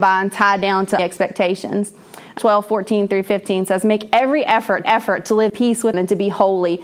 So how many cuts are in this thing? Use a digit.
5